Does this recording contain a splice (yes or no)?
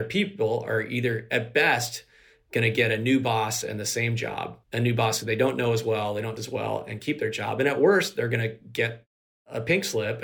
yes